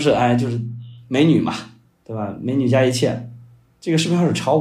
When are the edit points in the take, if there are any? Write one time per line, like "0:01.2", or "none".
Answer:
0:01.9